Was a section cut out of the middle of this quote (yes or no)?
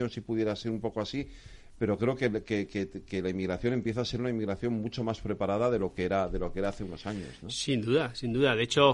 no